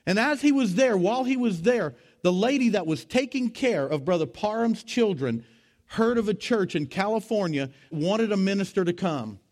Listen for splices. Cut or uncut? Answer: cut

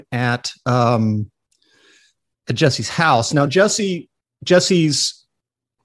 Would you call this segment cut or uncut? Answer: cut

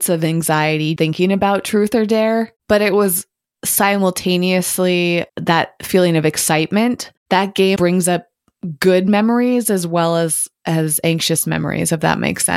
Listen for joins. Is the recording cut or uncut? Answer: cut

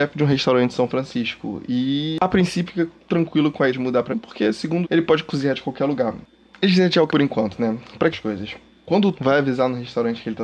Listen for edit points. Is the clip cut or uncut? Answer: cut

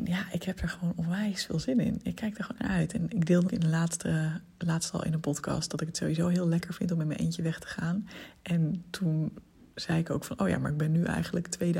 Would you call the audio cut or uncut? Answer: cut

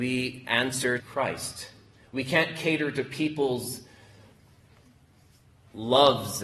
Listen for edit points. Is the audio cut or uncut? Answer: cut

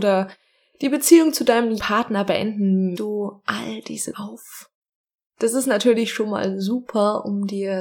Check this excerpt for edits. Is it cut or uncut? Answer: cut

